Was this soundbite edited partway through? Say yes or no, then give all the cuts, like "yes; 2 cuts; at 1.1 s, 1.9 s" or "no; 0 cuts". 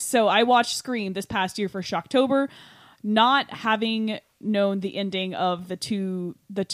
no; 0 cuts